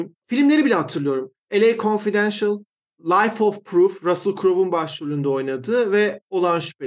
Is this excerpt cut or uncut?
uncut